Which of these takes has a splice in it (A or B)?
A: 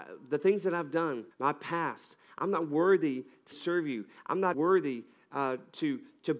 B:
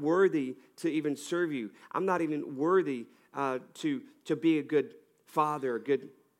A